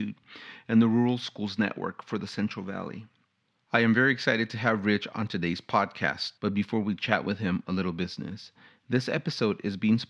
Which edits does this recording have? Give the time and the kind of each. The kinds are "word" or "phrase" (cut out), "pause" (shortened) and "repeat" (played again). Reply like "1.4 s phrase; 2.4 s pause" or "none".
6.4 s pause